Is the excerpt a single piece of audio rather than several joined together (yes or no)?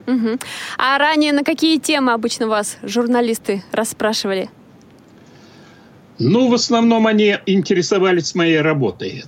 yes